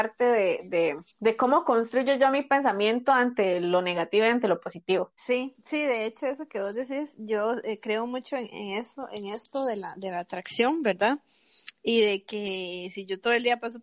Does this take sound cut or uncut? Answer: cut